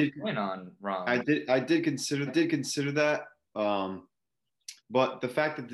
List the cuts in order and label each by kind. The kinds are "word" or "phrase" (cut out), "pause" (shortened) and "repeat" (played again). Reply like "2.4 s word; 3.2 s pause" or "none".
2.3 s repeat; 4.8 s pause